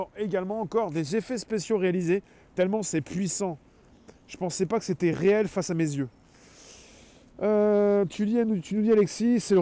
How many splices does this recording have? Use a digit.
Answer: 0